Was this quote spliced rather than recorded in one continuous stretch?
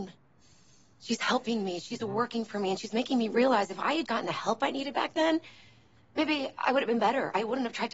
yes; 1 cut; at 4.1 s

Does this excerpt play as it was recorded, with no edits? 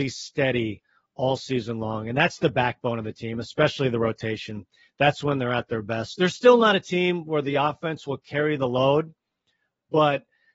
yes; 0 cuts

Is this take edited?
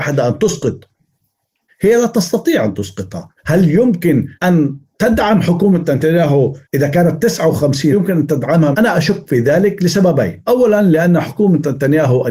yes; 6 cuts; at 1.7 s, 3.4 s, 4.4 s, 6.6 s, 7.9 s, 8.7 s

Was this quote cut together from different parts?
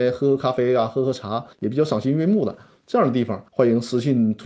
yes; 2 cuts; at 1.5 s, 3.5 s

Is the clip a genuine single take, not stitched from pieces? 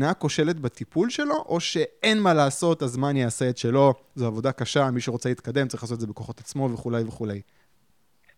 yes; 0 cuts

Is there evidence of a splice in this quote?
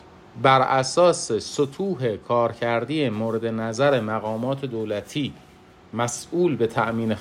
no; 0 cuts

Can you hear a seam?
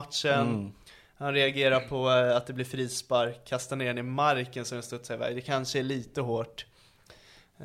no; 0 cuts

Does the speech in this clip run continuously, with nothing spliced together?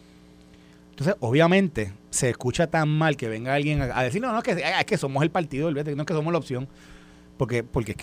yes; 0 cuts

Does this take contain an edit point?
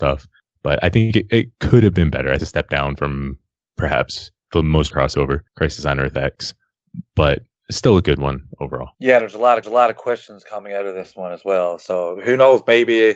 yes; 6 cuts; at 2.4 s, 4.4 s, 4.9 s, 5.5 s, 8.9 s, 9.6 s

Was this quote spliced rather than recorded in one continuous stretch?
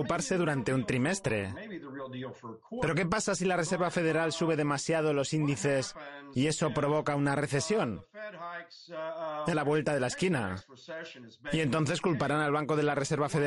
yes; 1 cut; at 9.5 s

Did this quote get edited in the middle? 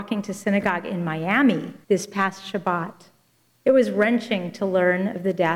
yes; 2 cuts; at 1.8 s, 3.3 s

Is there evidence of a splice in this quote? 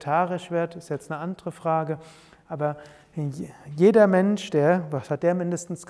no; 0 cuts

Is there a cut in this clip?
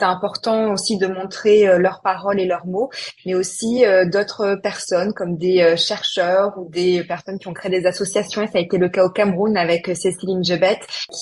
no; 0 cuts

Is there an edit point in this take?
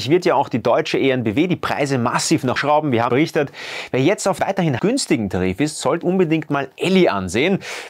yes; 5 cuts; at 2.6 s, 3.1 s, 4.4 s, 4.8 s, 6.0 s

